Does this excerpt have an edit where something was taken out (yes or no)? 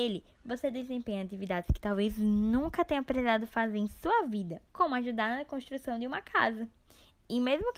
yes